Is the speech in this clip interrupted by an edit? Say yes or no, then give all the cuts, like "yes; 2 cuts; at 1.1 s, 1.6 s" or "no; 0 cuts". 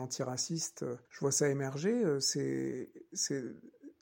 yes; 1 cut; at 1.0 s